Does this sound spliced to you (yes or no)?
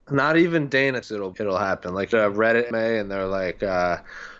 yes